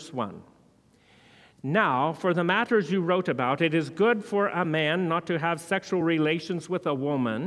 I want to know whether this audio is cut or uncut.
uncut